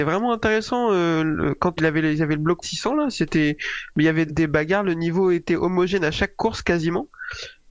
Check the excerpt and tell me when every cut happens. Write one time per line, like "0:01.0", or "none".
0:01.8
0:02.6
0:04.3